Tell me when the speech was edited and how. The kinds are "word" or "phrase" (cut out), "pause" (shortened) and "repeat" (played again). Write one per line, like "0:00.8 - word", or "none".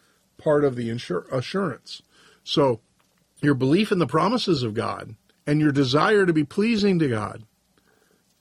0:03.0 - pause
0:05.3 - pause

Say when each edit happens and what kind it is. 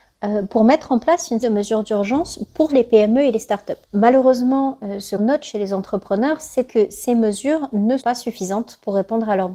0:01.4 - word
0:02.7 - word
0:03.8 - pause
0:05.2 - word
0:06.7 - phrase
0:08.0 - word

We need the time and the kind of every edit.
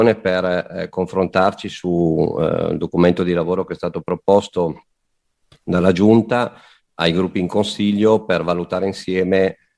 none

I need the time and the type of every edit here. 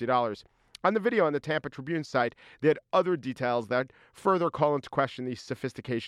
none

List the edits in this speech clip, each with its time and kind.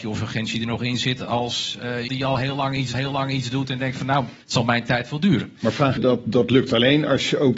0:02.1 - word
0:02.9 - repeat
0:04.4 - pause
0:06.0 - phrase

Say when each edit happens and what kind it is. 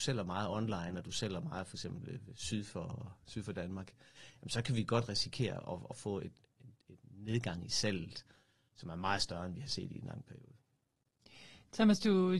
none

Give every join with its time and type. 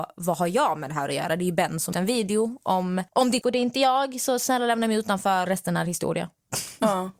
0:01.9 - phrase
0:03.1 - pause
0:03.4 - word
0:05.5 - word

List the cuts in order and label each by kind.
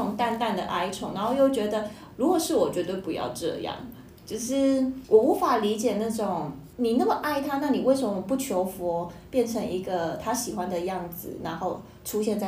0:02.1 - pause
0:06.7 - pause

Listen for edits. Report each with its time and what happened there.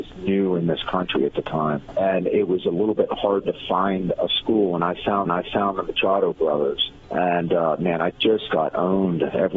0:05.3 - repeat

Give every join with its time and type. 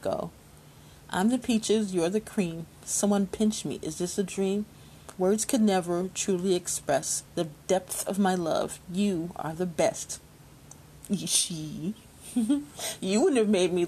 0:05.1 - pause
0:07.3 - pause

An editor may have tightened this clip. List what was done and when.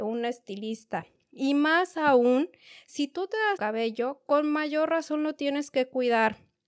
0:03.6 - phrase

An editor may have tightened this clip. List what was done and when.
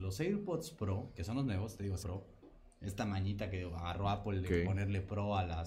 0:02.0 - word

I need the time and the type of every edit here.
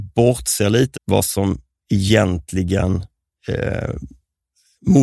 0:00.9 - word

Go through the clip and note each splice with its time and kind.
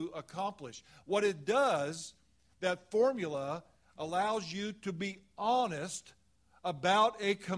none

